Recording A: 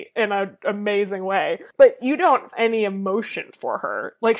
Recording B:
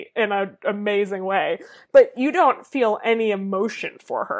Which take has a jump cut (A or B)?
A